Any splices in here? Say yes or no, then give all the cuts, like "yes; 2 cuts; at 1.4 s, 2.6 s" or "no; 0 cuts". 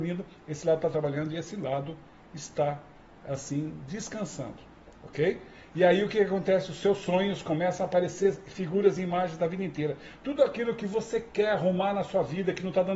no; 0 cuts